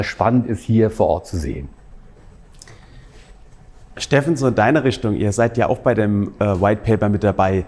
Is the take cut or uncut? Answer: uncut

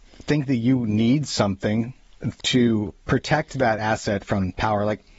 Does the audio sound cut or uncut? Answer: uncut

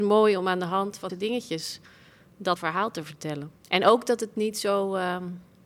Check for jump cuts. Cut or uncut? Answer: cut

